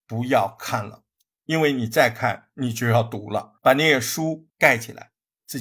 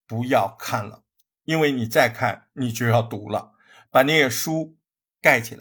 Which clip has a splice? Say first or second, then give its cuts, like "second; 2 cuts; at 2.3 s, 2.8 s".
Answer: first; 2 cuts; at 3.6 s, 4.5 s